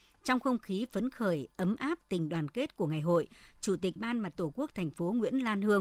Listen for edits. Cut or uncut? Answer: cut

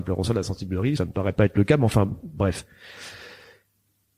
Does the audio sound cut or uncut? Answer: cut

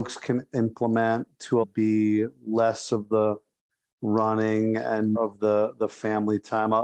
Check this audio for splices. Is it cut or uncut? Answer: cut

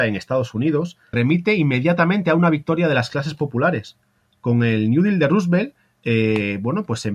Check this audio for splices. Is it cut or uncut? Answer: cut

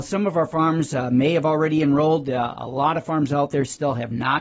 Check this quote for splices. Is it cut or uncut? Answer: uncut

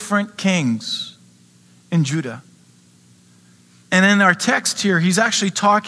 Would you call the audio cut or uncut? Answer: uncut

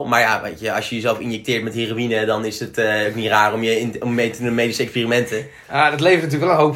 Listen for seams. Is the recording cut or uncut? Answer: uncut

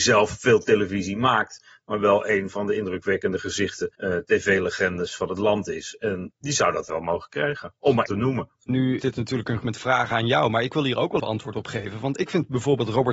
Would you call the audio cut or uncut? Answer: cut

